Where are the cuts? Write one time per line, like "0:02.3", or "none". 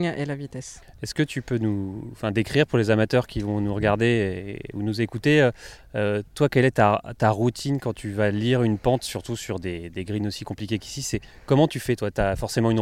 none